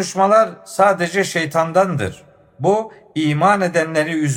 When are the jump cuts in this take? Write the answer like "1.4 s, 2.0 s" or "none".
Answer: none